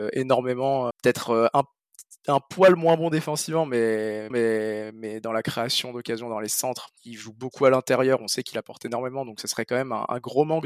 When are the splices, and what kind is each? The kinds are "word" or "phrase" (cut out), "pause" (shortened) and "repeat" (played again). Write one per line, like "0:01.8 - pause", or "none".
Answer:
0:00.9 - word
0:04.3 - repeat
0:07.0 - pause